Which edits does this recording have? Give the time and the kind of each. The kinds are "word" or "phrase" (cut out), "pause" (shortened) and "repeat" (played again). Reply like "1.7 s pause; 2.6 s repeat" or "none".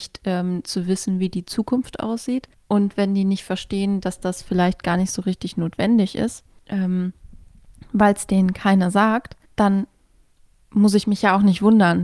2.5 s pause; 6.6 s pause; 9.4 s pause

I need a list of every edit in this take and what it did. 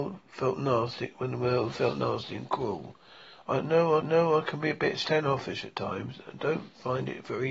4.0 s repeat

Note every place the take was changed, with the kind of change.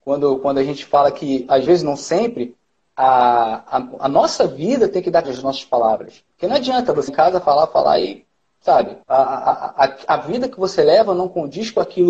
1.7 s phrase; 5.2 s word; 6.3 s pause; 7.1 s word; 7.4 s word; 9.0 s pause

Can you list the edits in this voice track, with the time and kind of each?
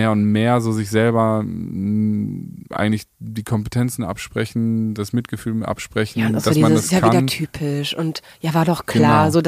none

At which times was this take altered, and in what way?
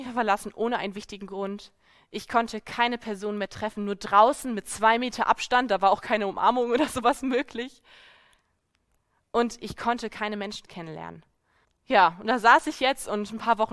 11.6 s pause

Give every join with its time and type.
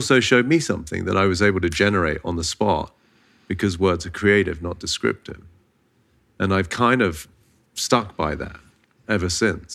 none

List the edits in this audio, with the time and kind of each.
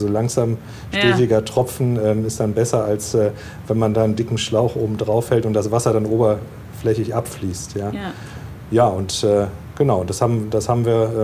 none

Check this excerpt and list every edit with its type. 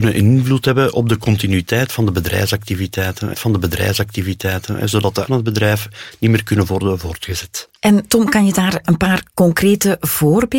3.3 s repeat; 5.2 s word; 7.8 s pause

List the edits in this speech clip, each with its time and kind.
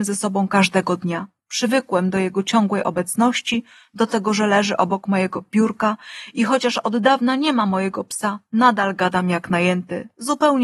none

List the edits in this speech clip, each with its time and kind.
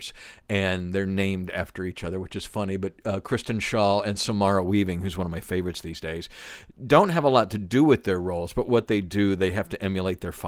none

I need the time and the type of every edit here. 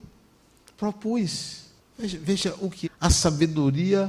1.8 s pause; 2.8 s word

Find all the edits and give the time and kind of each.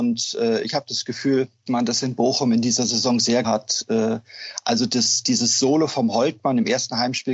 1.7 s word; 3.4 s word

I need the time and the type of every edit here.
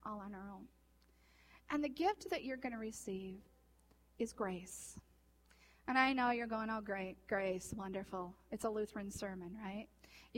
none

